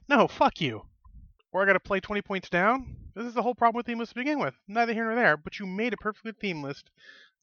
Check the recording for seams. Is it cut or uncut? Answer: uncut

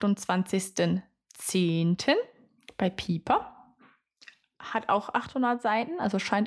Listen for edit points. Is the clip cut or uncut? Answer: uncut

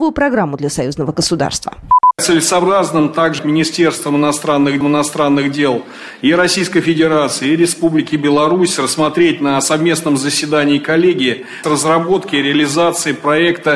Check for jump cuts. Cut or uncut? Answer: cut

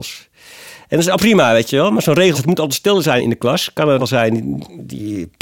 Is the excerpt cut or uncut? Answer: cut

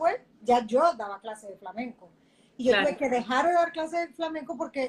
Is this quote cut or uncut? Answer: uncut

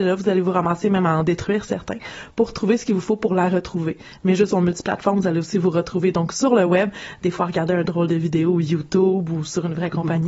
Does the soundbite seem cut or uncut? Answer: uncut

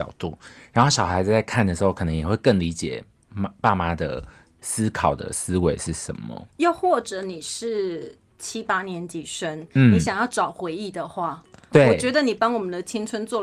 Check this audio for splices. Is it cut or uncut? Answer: uncut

